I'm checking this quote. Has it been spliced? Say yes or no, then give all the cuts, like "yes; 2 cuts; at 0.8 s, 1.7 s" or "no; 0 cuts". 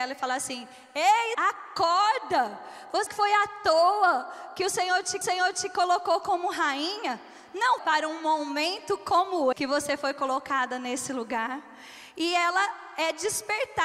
yes; 5 cuts; at 1.3 s, 3.1 s, 5.2 s, 7.8 s, 9.5 s